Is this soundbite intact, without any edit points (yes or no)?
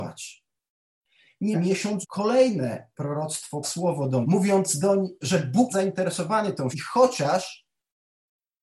no